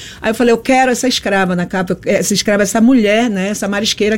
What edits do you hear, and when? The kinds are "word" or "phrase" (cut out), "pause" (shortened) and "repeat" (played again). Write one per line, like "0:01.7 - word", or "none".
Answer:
none